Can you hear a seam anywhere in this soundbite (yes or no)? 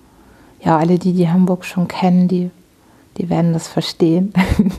no